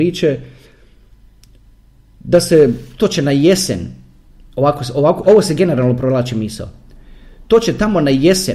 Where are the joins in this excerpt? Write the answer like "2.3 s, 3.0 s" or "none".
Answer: 5.2 s